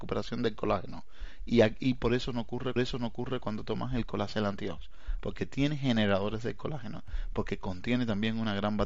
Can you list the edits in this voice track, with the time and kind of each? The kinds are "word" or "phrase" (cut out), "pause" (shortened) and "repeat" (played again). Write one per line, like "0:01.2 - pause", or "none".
0:02.8 - repeat